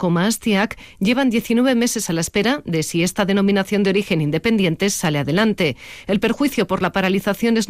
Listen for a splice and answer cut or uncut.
uncut